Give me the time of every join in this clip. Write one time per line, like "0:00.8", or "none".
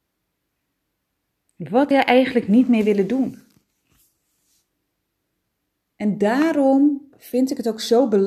0:01.9